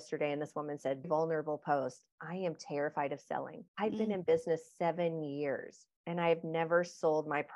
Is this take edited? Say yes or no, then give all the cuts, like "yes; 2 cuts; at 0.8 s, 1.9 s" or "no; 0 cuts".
yes; 3 cuts; at 1.0 s, 3.7 s, 6.0 s